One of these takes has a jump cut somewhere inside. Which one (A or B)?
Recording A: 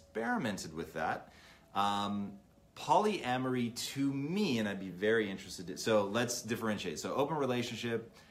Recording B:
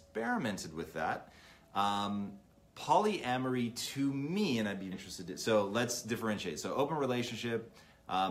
B